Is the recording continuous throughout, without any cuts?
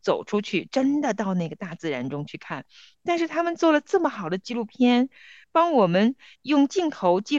yes; 0 cuts

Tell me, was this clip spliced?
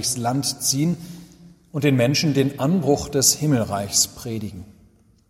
no; 0 cuts

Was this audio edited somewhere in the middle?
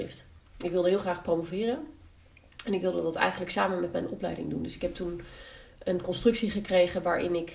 no; 0 cuts

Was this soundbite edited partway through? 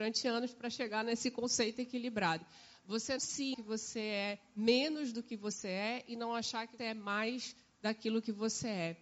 yes; 3 cuts; at 3.2 s, 3.5 s, 6.8 s

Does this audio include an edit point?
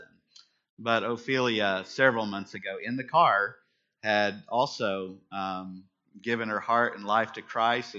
no; 0 cuts

